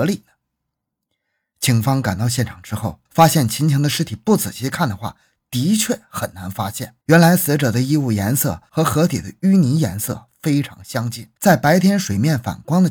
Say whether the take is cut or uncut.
cut